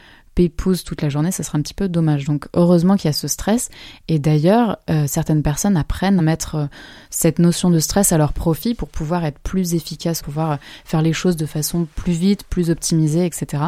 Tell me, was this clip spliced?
yes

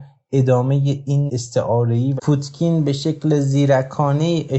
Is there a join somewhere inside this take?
yes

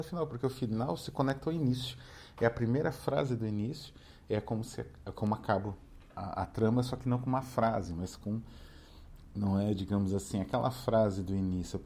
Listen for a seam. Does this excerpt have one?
no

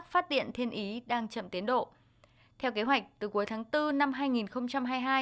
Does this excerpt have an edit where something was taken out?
no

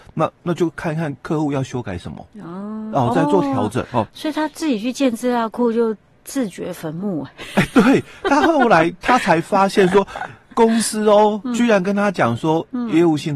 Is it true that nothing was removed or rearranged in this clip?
yes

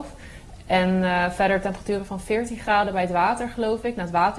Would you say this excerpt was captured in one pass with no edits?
yes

